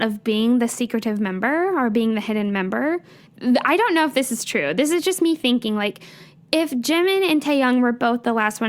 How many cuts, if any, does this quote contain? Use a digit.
0